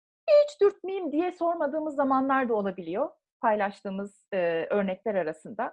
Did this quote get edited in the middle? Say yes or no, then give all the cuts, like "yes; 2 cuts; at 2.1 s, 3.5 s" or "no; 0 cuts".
no; 0 cuts